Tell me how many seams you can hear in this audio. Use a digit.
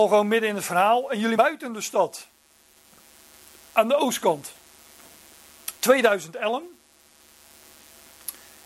2